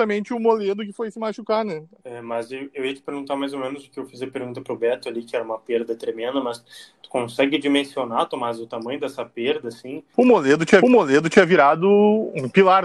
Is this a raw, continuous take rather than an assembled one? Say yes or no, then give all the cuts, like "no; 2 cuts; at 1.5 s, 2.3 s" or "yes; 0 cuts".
no; 1 cut; at 10.8 s